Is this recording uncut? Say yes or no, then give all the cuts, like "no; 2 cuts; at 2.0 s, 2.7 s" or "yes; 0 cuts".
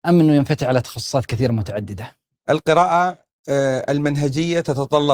no; 1 cut; at 2.3 s